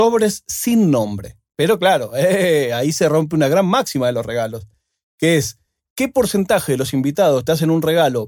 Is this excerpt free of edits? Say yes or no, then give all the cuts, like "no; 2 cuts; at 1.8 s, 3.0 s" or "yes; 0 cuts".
yes; 0 cuts